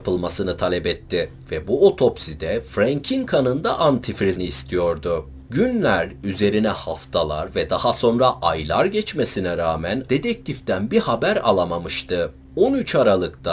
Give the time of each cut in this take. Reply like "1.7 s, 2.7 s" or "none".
4.4 s, 10.1 s